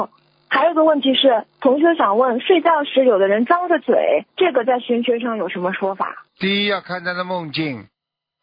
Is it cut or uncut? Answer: cut